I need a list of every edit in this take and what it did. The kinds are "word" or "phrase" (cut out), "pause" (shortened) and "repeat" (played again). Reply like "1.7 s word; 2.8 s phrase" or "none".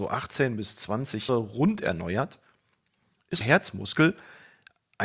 1.3 s word; 3.4 s word